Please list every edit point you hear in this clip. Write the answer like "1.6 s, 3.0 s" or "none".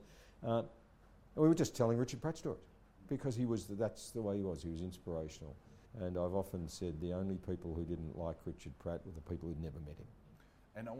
5.8 s